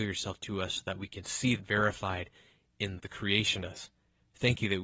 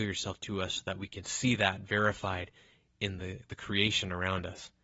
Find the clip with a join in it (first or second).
first